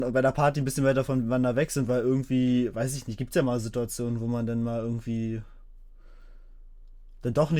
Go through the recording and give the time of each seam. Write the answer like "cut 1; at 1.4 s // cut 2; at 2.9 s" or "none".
none